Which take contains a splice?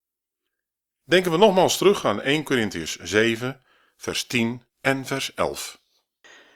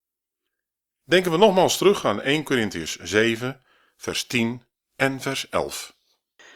first; 1 cut; at 4.7 s

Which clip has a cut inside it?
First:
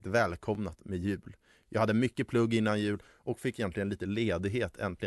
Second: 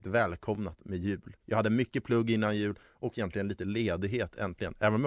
second; 2 cuts; at 1.4 s, 3.1 s

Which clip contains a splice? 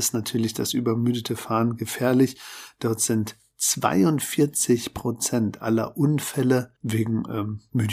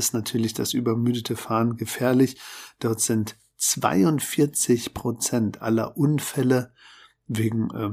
first; 1 cut; at 6.8 s

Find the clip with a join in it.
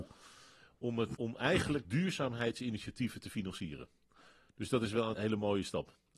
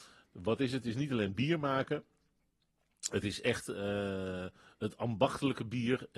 first; 3 cuts; at 1.1 s, 1.8 s, 5.1 s

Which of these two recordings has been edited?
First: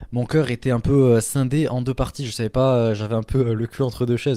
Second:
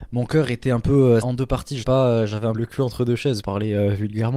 second; 4 cuts; at 1.2 s, 1.8 s, 2.5 s, 3.4 s

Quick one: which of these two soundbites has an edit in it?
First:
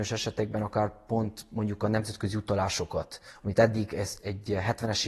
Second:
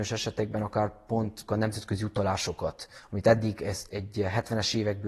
second; 1 cut; at 1.5 s

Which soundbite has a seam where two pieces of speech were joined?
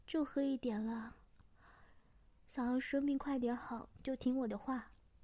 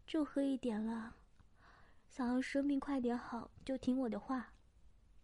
second; 1 cut; at 2.0 s

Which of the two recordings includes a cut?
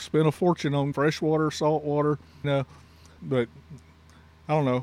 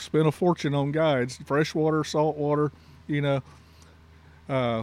first; 3 cuts; at 0.9 s, 2.4 s, 3.2 s

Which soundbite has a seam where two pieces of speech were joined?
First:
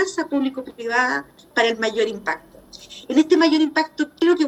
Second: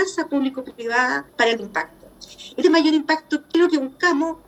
second; 3 cuts; at 1.3 s, 1.6 s, 2.6 s

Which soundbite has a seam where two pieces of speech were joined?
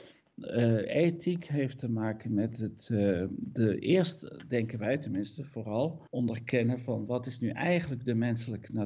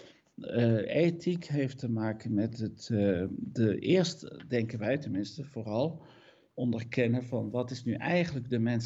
first; 1 cut; at 6.1 s

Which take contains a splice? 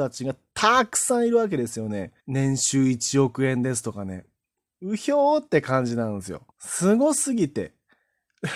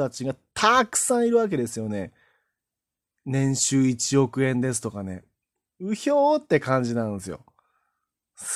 first; 2 cuts; at 2.2 s, 6.5 s

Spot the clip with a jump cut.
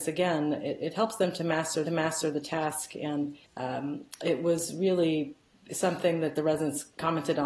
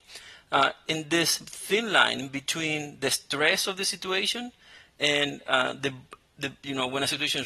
first; 2 cuts; at 1.9 s, 3.5 s

